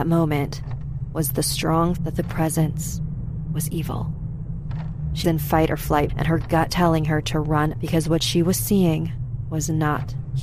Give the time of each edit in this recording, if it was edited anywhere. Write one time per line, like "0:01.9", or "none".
0:02.0
0:05.2
0:06.1
0:06.7
0:07.7

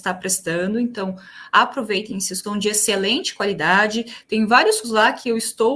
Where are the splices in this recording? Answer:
0:02.4
0:04.8

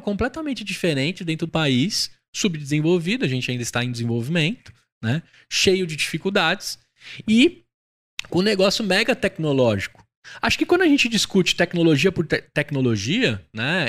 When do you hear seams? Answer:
0:01.5

